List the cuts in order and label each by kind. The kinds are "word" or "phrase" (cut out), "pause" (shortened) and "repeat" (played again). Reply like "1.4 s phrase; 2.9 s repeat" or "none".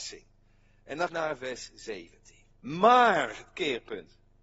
1.1 s phrase; 2.5 s pause